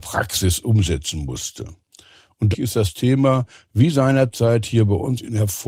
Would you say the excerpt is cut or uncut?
cut